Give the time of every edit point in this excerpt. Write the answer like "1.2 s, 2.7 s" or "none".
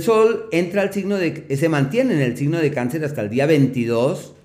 none